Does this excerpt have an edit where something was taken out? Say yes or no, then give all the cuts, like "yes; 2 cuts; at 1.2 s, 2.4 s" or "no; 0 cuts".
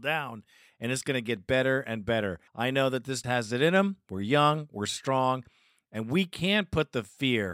yes; 2 cuts; at 2.5 s, 3.2 s